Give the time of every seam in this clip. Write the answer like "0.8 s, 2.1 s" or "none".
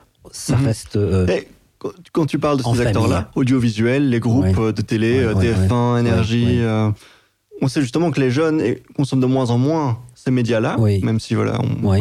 none